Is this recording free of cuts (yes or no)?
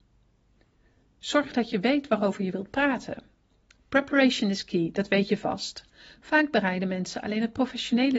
yes